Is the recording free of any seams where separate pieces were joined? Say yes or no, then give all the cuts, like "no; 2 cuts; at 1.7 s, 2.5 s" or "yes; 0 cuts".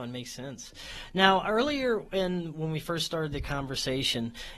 yes; 0 cuts